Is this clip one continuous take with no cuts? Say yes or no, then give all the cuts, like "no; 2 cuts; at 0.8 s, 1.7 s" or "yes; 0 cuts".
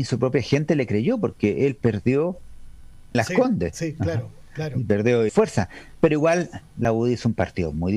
no; 2 cuts; at 3.1 s, 5.3 s